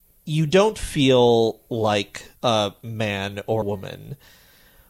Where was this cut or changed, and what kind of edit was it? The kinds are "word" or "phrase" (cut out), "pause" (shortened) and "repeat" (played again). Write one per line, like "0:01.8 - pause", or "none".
0:02.4 - pause
0:03.6 - word